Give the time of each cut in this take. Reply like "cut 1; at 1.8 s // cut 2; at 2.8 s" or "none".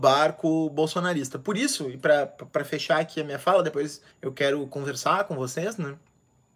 cut 1; at 4.1 s